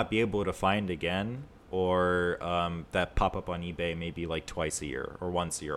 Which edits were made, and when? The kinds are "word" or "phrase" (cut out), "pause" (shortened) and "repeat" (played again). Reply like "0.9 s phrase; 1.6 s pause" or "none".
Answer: none